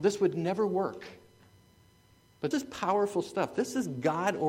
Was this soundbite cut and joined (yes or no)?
yes